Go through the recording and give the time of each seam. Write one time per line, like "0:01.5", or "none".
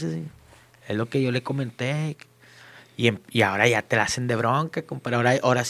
none